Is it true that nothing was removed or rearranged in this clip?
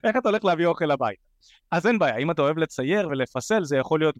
yes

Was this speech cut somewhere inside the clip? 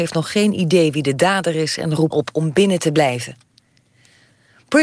yes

